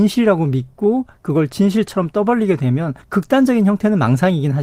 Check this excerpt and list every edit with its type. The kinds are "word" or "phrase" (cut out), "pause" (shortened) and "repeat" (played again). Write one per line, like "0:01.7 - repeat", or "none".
0:03.0 - pause